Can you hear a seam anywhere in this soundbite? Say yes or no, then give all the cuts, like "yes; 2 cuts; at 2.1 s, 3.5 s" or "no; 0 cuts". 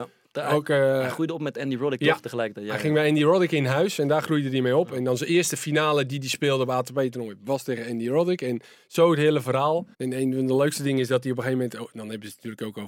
yes; 1 cut; at 9.9 s